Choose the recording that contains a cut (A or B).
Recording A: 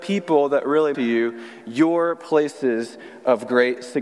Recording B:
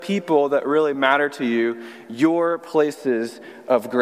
A